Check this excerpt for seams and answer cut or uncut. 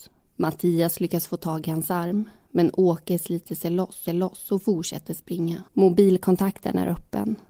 cut